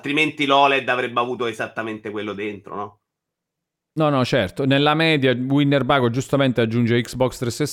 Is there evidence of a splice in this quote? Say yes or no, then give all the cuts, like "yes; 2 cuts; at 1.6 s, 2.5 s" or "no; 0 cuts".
no; 0 cuts